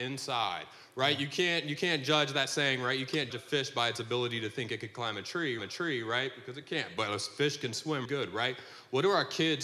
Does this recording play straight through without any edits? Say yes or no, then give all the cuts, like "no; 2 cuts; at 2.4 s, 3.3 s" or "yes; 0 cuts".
no; 3 cuts; at 3.3 s, 5.6 s, 8.0 s